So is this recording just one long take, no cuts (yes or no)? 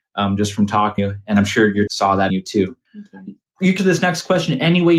no